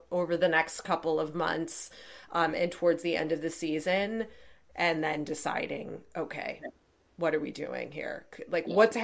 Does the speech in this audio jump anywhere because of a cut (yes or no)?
no